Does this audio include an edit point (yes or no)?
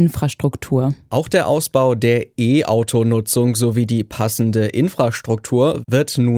no